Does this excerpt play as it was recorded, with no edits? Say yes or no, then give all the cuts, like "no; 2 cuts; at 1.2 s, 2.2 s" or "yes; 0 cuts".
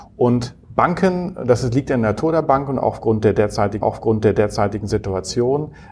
no; 1 cut; at 3.8 s